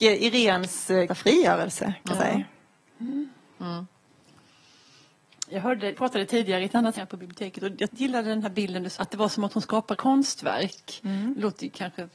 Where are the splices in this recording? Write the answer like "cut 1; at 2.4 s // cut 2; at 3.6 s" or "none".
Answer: cut 1; at 1.1 s // cut 2; at 2.1 s // cut 3; at 5.9 s // cut 4; at 7.0 s // cut 5; at 7.9 s // cut 6; at 9.0 s // cut 7; at 9.9 s